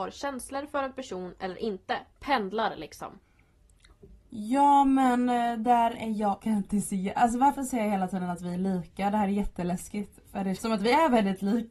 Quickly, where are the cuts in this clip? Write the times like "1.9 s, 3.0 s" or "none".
2.1 s, 6.4 s, 10.6 s